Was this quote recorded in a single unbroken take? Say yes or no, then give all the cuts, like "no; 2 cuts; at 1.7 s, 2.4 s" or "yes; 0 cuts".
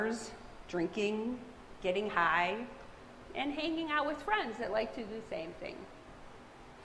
yes; 0 cuts